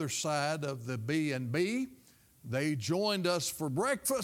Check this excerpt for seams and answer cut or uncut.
uncut